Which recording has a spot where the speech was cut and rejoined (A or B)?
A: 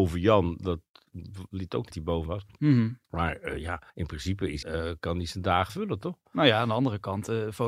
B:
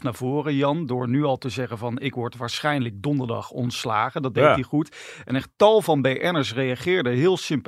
A